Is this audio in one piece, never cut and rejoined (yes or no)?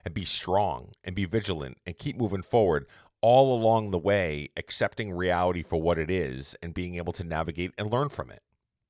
yes